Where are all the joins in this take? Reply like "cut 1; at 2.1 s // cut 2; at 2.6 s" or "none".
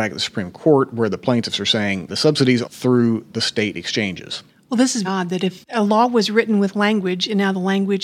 cut 1; at 2.1 s // cut 2; at 2.6 s // cut 3; at 4.5 s // cut 4; at 5.0 s